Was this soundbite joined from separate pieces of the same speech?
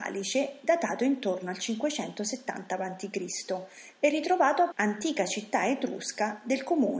yes; 1 cut; at 4.7 s

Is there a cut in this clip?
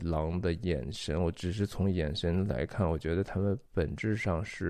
yes; 1 cut; at 3.7 s

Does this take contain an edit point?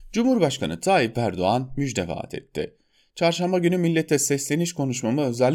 no; 0 cuts

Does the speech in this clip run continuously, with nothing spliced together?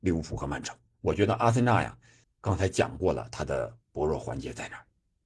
no; 2 cuts; at 2.2 s, 3.8 s

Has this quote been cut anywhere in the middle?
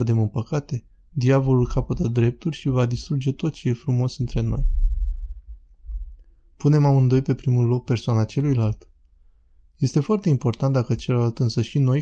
no; 0 cuts

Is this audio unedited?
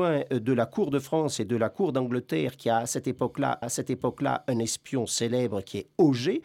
no; 1 cut; at 3.6 s

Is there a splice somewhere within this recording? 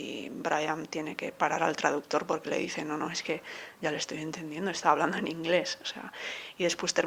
no; 0 cuts

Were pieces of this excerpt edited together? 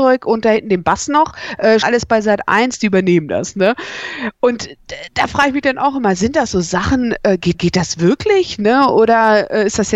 yes; 2 cuts; at 1.8 s, 7.5 s

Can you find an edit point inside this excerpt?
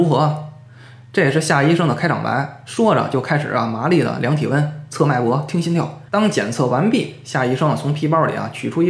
yes; 1 cut; at 6.1 s

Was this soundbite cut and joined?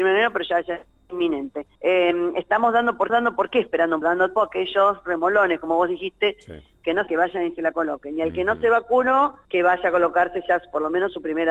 yes; 6 cuts; at 1.8 s, 3.1 s, 4.0 s, 4.4 s, 7.1 s, 9.4 s

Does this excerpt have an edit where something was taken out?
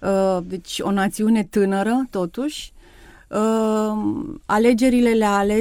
no; 0 cuts

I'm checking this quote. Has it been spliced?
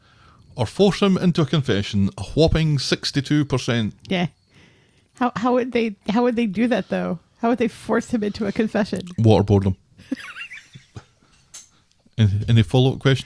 no; 0 cuts

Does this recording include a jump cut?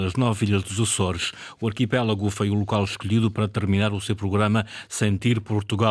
no; 0 cuts

